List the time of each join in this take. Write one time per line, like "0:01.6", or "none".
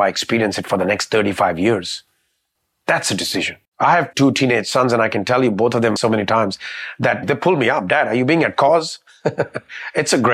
0:02.6
0:03.6
0:06.0
0:07.2